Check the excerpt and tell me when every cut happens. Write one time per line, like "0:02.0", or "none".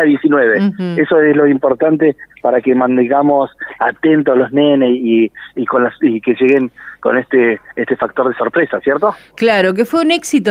0:03.8